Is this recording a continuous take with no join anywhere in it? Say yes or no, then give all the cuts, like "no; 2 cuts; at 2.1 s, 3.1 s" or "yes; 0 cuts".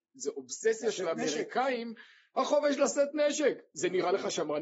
yes; 0 cuts